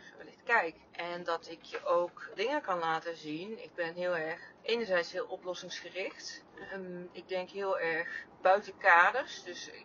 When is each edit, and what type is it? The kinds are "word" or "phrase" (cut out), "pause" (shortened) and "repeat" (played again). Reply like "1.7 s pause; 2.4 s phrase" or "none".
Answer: 2.4 s word